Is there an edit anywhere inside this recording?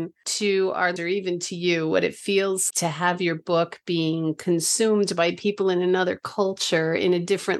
yes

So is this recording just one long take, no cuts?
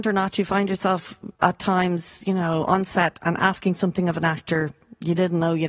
no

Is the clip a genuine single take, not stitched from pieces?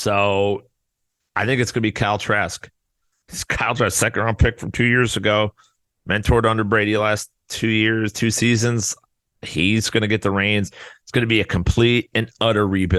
yes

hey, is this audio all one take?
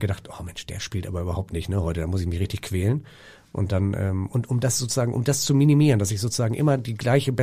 yes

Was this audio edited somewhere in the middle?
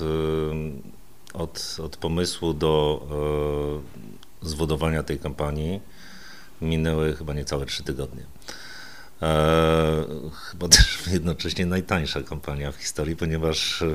no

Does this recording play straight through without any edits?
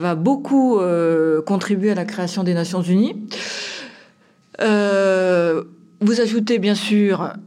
yes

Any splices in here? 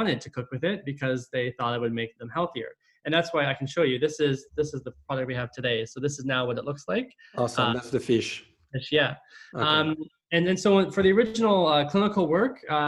yes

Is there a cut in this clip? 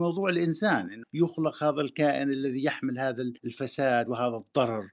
yes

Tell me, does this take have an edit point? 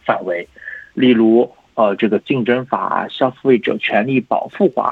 no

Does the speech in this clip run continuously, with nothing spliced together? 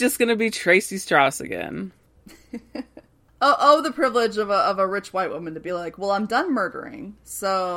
yes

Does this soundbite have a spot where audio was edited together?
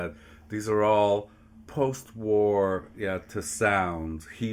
yes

